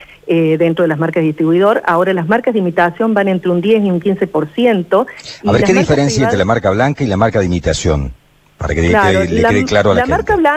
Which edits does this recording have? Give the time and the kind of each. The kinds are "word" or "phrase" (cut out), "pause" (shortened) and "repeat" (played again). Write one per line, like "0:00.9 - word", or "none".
none